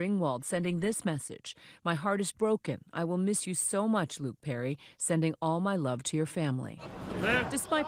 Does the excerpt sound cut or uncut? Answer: uncut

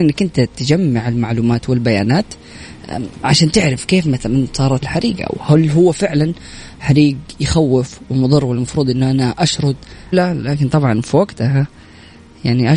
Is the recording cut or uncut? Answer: cut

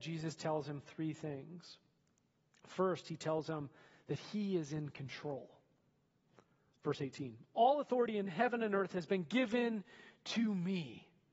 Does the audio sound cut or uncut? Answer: uncut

